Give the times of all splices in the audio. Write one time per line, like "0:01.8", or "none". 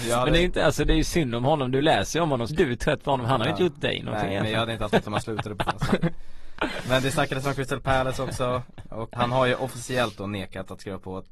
0:02.5
0:05.0
0:05.7
0:09.2